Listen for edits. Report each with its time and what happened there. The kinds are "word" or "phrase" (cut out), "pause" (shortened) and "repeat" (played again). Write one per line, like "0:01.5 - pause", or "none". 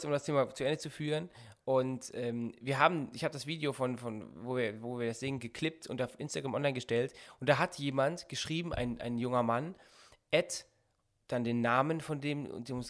none